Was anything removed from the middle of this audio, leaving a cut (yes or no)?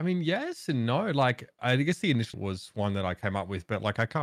yes